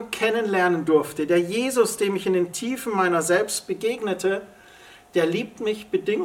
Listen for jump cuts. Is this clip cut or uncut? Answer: uncut